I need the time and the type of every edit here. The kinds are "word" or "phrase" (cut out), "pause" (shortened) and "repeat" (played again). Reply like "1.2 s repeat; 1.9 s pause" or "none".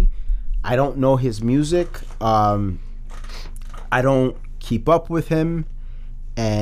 none